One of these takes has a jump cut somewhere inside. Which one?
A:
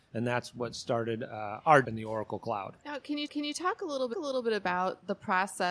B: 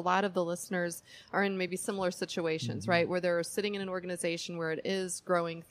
A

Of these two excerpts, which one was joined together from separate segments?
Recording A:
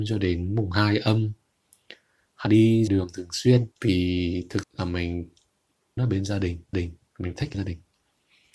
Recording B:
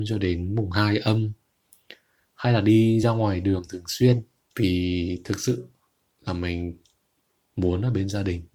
A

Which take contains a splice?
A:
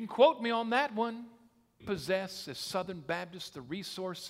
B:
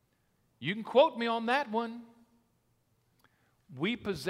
A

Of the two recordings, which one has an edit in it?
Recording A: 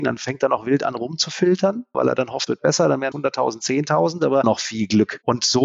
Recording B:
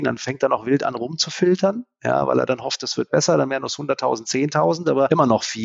A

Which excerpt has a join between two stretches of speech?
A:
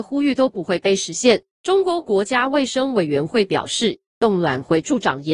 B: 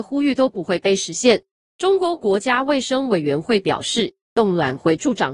A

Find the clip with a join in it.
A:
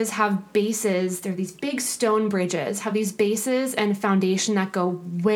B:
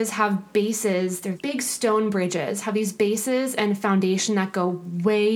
B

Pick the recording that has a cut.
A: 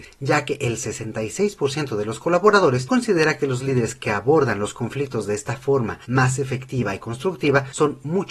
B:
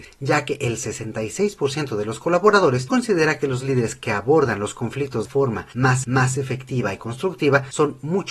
B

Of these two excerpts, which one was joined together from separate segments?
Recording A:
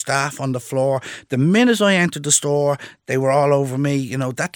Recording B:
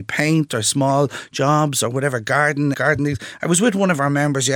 B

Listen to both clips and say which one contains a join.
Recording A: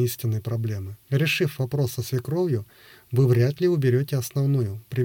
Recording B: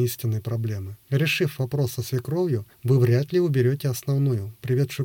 B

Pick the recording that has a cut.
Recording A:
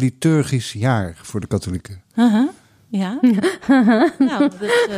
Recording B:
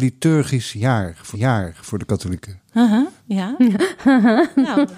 B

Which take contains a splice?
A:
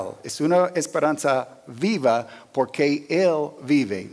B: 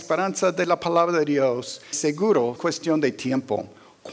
B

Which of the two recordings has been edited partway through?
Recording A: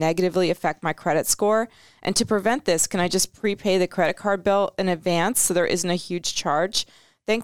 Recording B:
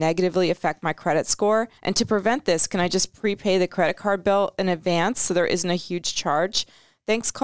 B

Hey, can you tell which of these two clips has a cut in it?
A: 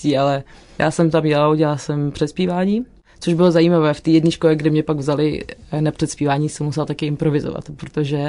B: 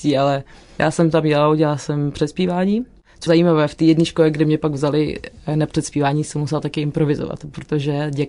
B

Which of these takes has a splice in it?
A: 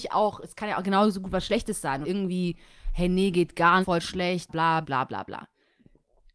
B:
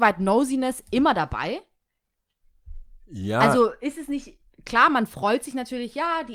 A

